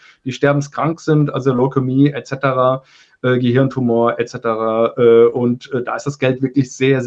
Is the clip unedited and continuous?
yes; 0 cuts

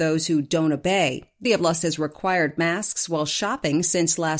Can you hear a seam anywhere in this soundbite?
yes; 2 cuts; at 1.5 s, 1.8 s

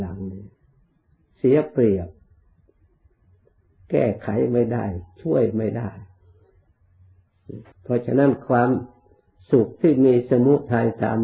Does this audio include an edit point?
yes; 1 cut; at 7.7 s

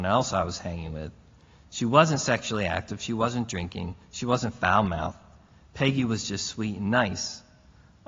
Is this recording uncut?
yes; 0 cuts

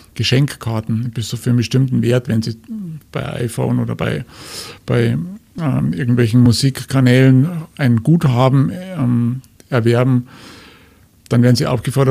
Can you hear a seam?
no; 0 cuts

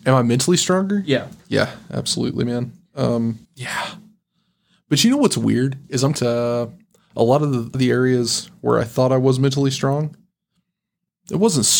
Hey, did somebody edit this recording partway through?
yes; 3 cuts; at 3.5 s, 6.1 s, 7.7 s

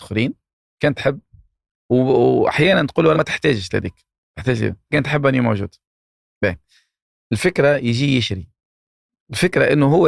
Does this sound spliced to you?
yes; 3 cuts; at 3.1 s, 3.7 s, 4.9 s

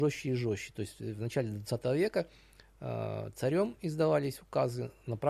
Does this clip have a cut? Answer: no; 0 cuts

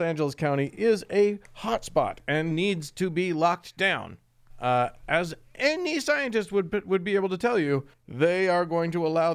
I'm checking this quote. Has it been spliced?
yes; 1 cut; at 7.9 s

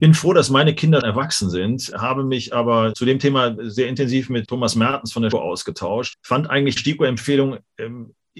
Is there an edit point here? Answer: yes; 7 cuts; at 1.0 s, 1.9 s, 2.9 s, 4.4 s, 5.3 s, 6.1 s, 6.8 s

